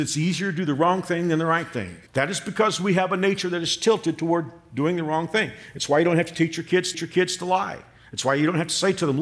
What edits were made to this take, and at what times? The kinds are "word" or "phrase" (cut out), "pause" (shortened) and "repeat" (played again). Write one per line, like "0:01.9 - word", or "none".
0:02.1 - pause
0:06.9 - repeat

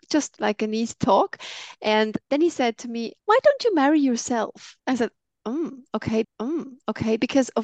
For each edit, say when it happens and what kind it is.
0:02.2 - pause
0:03.2 - pause
0:04.8 - pause
0:06.2 - repeat

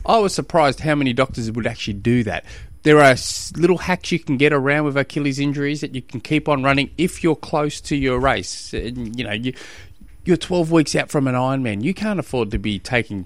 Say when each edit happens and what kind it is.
none

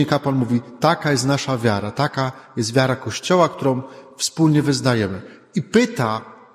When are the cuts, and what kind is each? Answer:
none

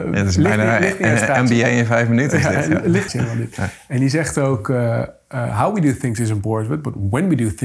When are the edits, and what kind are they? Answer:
0:03.1 - word

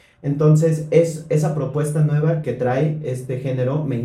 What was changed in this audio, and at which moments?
0:02.4 - word

